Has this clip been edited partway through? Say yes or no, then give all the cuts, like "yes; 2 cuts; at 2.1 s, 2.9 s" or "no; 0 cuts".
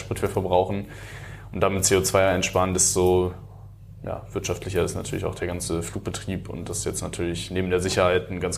no; 0 cuts